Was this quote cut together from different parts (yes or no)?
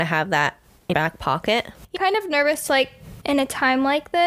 yes